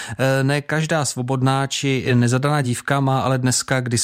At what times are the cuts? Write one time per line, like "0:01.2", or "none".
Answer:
none